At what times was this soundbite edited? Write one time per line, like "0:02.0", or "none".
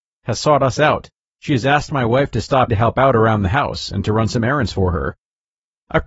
0:01.2
0:02.7